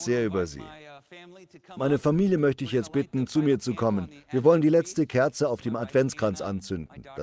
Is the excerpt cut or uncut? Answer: uncut